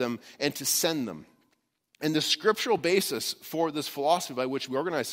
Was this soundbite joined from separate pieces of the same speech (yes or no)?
no